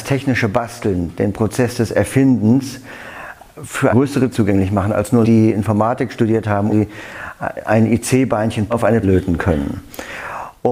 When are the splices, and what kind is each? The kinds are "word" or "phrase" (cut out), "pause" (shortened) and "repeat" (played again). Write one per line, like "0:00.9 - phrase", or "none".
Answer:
0:03.9 - word
0:04.3 - word
0:05.2 - word
0:06.7 - word
0:08.7 - word
0:09.0 - word